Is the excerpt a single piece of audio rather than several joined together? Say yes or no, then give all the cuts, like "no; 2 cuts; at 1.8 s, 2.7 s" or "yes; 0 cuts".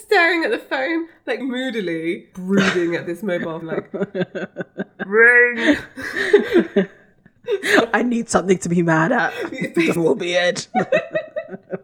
no; 4 cuts; at 1.4 s, 2.3 s, 3.6 s, 10.0 s